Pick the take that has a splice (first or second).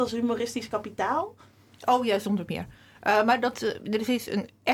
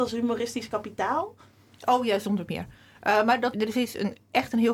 second